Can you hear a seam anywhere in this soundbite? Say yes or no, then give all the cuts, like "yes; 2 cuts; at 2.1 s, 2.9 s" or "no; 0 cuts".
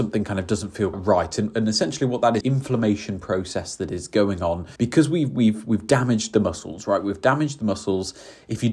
yes; 3 cuts; at 0.9 s, 2.4 s, 4.8 s